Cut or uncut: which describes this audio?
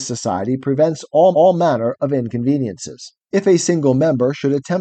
cut